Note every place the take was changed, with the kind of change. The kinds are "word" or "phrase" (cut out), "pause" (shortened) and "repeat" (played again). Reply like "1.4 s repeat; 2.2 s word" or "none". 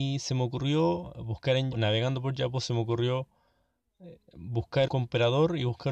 1.7 s word; 4.9 s word